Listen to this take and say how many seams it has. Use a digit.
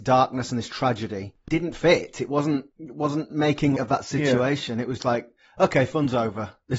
3